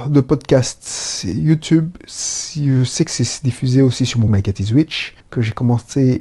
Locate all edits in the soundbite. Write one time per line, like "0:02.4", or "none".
0:04.3
0:05.2

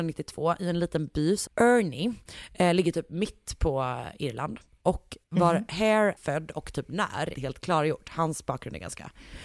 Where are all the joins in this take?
0:01.5
0:06.2
0:07.3

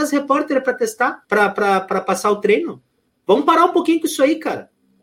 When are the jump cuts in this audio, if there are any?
0:01.2
0:03.1

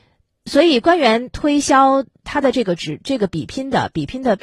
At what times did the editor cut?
0:02.2

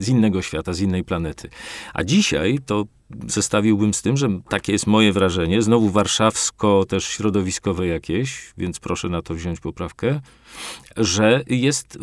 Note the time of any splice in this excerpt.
none

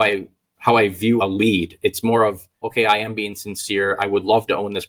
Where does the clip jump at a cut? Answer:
0:01.2
0:02.6

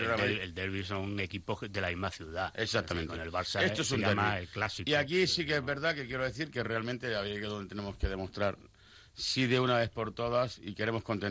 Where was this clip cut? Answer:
none

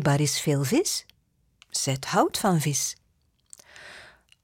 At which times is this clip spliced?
none

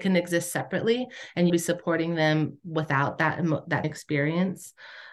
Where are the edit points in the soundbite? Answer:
0:01.5
0:03.8

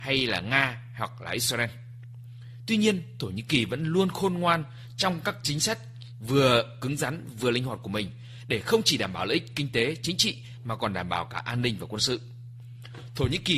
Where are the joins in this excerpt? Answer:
none

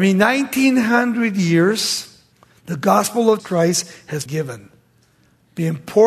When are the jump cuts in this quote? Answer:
0:02.3
0:03.4
0:04.3

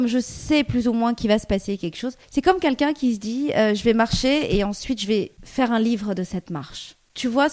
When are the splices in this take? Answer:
0:02.2

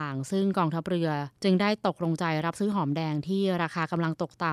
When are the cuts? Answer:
0:01.4

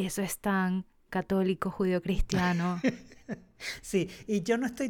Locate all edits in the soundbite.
none

